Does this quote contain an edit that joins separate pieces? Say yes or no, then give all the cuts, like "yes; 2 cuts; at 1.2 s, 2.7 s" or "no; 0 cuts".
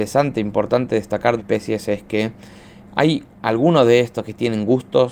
yes; 2 cuts; at 1.4 s, 3.3 s